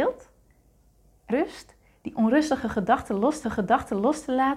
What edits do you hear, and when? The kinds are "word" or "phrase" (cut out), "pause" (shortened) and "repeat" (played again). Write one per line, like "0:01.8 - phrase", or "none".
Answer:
0:01.3 - phrase
0:03.4 - repeat